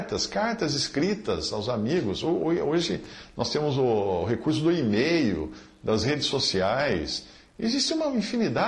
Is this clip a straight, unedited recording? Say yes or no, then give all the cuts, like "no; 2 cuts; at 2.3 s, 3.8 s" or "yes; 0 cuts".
yes; 0 cuts